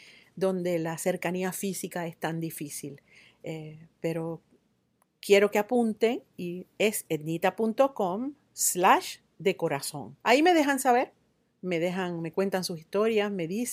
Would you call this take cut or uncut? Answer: cut